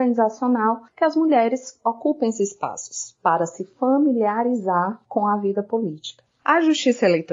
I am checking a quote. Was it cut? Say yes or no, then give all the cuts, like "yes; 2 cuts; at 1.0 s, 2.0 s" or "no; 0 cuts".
no; 0 cuts